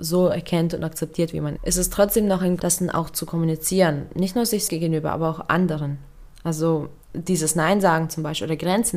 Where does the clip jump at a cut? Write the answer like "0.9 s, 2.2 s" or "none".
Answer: 1.6 s, 2.6 s, 4.7 s, 7.0 s